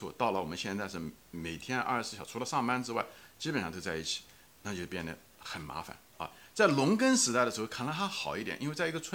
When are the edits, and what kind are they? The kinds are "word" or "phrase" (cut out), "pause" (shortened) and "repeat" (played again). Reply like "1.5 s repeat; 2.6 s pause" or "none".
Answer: 1.2 s pause